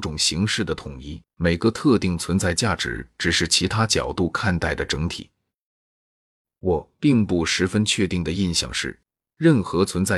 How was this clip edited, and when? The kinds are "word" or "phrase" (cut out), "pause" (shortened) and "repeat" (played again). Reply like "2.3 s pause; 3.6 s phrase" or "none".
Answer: 1.3 s pause